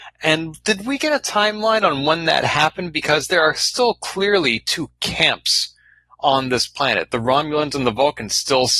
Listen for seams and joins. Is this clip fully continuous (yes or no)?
yes